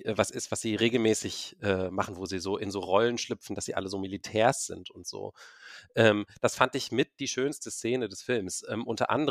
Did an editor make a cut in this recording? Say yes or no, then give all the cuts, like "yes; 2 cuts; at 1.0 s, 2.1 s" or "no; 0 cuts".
no; 0 cuts